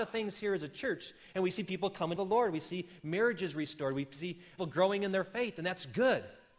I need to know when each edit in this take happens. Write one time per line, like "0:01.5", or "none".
0:02.2
0:04.6